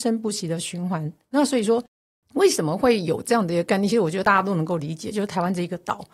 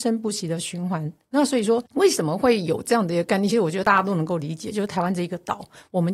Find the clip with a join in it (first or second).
second